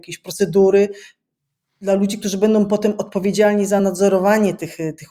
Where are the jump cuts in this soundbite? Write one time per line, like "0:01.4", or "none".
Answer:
none